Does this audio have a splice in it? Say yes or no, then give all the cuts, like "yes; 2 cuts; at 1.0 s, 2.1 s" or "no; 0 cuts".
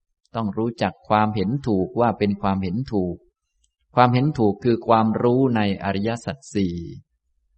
no; 0 cuts